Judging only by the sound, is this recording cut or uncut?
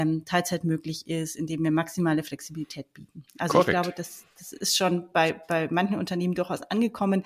uncut